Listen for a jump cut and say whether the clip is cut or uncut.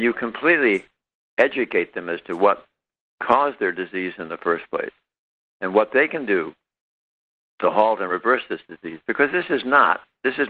uncut